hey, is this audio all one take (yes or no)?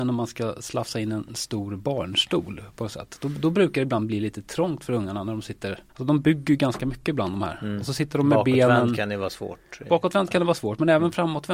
no